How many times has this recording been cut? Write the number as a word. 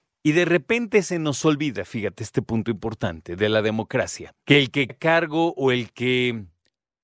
two